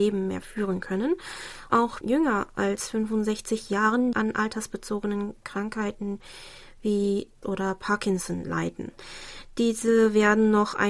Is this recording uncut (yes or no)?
no